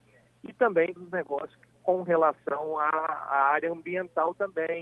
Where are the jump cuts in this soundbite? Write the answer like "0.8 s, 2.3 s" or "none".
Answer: 1.0 s

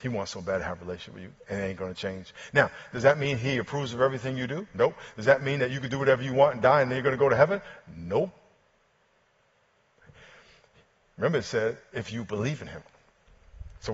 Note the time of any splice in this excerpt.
none

